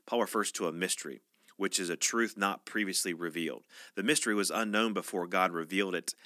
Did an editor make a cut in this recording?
no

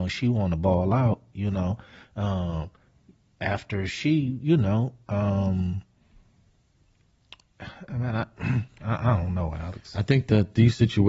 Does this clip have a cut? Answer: no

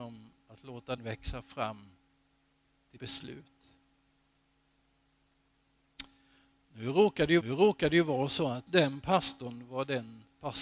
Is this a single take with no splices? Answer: no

